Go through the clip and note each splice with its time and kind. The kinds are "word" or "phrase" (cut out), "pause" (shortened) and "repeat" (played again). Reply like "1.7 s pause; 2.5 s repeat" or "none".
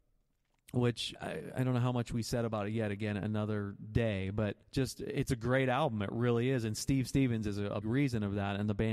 1.1 s word; 4.6 s pause; 7.8 s word

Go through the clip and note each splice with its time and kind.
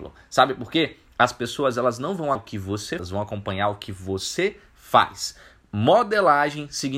2.3 s word; 3.0 s word

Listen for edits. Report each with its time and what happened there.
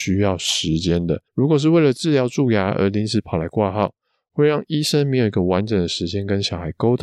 1.3 s pause

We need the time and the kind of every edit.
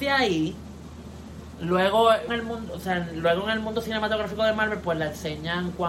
2.3 s word

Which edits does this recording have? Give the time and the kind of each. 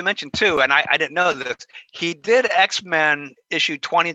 none

